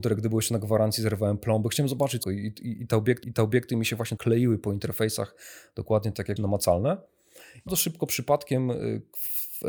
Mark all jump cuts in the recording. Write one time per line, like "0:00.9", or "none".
0:02.2
0:03.2
0:04.2
0:06.4
0:07.7